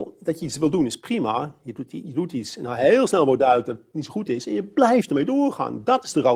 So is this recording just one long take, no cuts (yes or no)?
yes